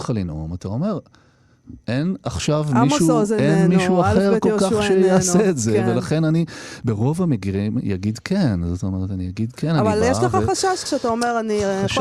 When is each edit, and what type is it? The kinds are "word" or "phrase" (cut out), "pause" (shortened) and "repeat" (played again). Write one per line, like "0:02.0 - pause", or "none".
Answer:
0:01.8 - pause
0:10.9 - word